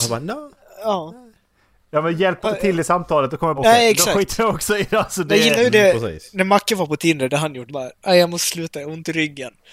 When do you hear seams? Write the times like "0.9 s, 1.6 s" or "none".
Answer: 2.4 s, 3.6 s, 7.7 s